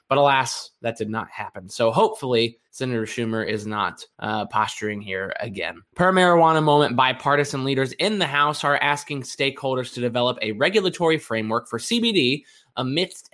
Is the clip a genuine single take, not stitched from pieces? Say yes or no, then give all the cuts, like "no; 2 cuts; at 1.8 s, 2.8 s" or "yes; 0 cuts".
no; 3 cuts; at 2.7 s, 4.1 s, 5.9 s